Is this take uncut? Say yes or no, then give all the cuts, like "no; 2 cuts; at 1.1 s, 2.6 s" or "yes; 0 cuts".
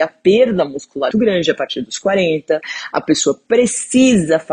no; 1 cut; at 1.1 s